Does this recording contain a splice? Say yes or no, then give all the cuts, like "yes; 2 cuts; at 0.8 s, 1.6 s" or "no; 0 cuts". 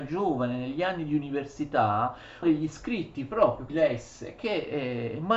yes; 2 cuts; at 2.4 s, 3.7 s